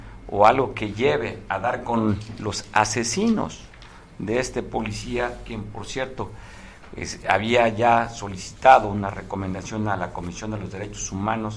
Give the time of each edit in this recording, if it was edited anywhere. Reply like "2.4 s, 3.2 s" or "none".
none